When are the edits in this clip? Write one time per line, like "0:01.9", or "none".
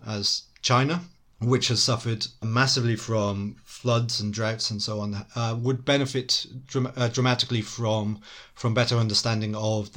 none